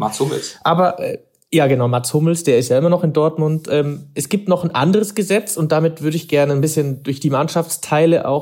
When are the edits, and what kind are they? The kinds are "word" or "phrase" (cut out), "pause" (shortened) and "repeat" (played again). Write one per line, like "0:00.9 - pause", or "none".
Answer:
none